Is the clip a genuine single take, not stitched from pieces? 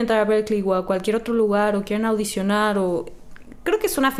yes; 0 cuts

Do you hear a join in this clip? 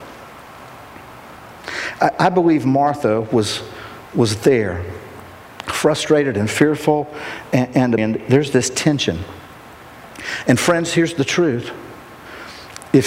yes; 2 cuts; at 4.1 s, 8.0 s

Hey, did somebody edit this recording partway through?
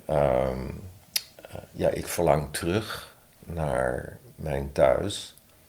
no; 0 cuts

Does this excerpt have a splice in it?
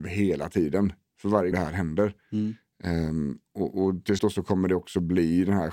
yes; 2 cuts; at 1.5 s, 4.2 s

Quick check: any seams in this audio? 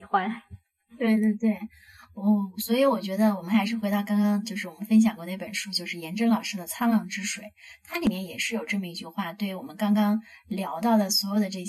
no; 0 cuts

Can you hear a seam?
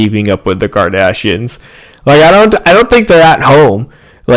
no; 0 cuts

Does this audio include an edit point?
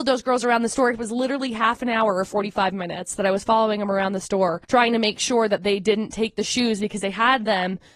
yes; 1 cut; at 4.6 s

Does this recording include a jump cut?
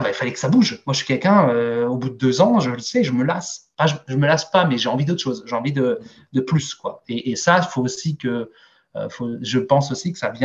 no; 0 cuts

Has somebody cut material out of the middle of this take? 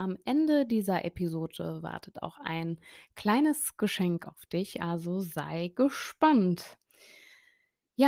no; 0 cuts

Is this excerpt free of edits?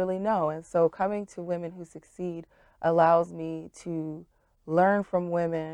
yes; 0 cuts

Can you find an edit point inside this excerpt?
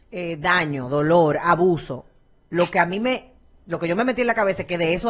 no; 0 cuts

